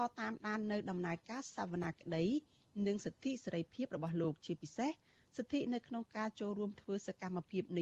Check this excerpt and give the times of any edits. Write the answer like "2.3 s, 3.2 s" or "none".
none